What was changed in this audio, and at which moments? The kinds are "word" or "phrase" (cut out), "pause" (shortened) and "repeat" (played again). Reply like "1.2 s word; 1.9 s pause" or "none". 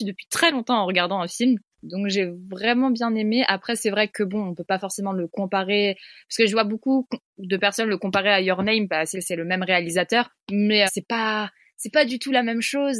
9.1 s phrase; 10.9 s word